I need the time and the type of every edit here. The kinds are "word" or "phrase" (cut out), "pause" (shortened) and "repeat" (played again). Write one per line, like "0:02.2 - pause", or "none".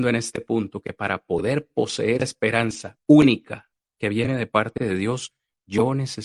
0:02.2 - word